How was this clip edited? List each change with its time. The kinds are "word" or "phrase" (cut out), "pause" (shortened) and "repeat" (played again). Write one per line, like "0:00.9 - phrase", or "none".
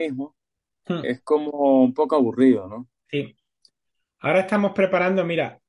none